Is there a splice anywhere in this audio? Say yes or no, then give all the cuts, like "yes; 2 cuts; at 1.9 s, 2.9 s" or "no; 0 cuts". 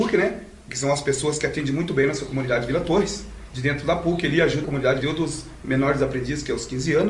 yes; 3 cuts; at 3.5 s, 4.6 s, 5.0 s